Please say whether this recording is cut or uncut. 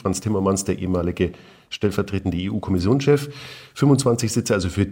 uncut